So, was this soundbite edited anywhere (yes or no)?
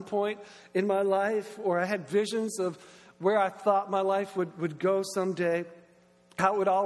no